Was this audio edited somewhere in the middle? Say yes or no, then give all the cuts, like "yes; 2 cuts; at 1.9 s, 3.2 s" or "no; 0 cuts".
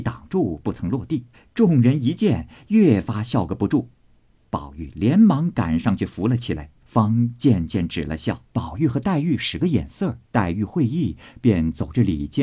yes; 4 cuts; at 1.3 s, 6.8 s, 8.5 s, 10.2 s